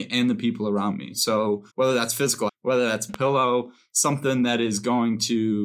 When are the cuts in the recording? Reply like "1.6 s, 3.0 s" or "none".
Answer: 1.7 s, 2.5 s, 3.1 s